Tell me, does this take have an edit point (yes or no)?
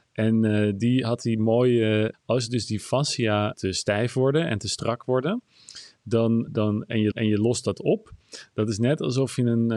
yes